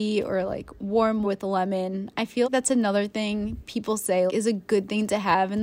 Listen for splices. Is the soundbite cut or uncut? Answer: cut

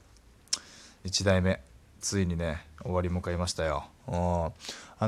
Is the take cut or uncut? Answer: cut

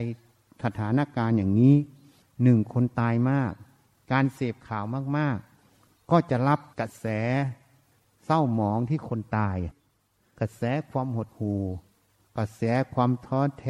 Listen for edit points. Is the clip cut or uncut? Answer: uncut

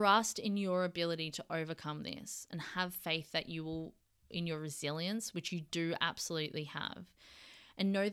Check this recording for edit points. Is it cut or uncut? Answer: uncut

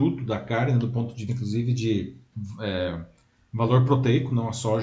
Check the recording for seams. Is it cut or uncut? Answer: cut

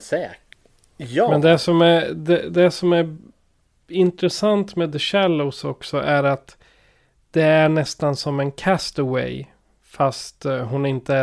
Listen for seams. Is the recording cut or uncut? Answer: uncut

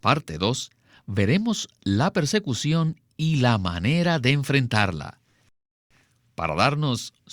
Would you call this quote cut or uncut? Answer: uncut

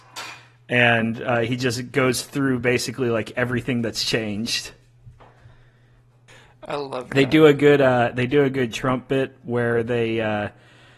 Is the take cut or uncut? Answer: uncut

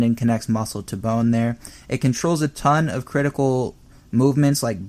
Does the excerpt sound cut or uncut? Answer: uncut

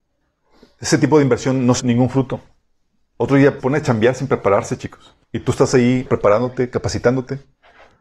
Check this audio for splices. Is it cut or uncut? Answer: cut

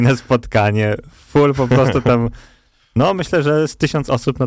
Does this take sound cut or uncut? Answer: uncut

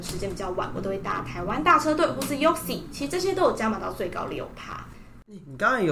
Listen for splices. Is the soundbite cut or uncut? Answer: uncut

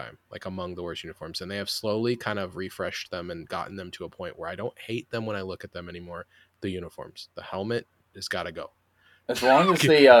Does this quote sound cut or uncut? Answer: uncut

